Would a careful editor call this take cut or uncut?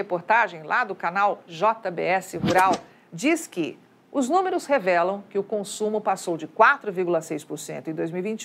uncut